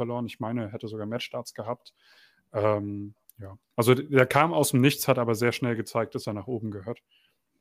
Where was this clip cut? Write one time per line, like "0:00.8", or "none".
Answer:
none